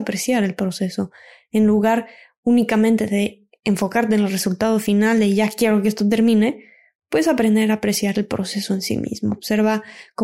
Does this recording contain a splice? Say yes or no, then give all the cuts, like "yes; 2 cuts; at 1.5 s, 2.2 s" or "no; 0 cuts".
no; 0 cuts